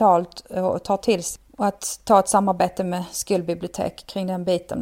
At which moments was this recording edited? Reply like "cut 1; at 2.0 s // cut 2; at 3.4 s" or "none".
cut 1; at 1.5 s